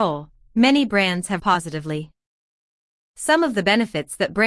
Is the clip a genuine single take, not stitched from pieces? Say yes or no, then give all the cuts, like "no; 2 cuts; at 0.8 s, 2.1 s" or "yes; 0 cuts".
no; 1 cut; at 1.4 s